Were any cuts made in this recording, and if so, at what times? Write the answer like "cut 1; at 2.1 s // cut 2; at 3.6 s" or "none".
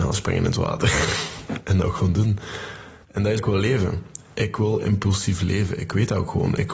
cut 1; at 3.0 s // cut 2; at 3.4 s